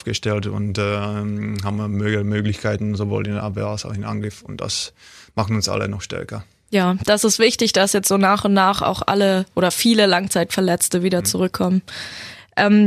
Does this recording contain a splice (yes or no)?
no